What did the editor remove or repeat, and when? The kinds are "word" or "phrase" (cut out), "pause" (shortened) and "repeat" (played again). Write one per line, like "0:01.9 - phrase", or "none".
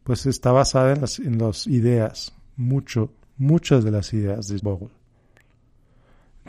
0:04.6 - word